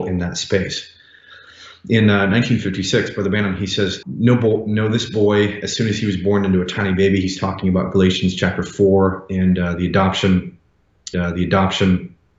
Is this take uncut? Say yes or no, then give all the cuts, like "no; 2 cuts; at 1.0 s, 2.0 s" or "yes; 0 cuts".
no; 2 cuts; at 4.0 s, 11.1 s